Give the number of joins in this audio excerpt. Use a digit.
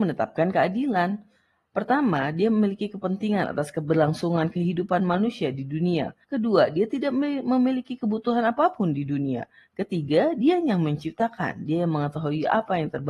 1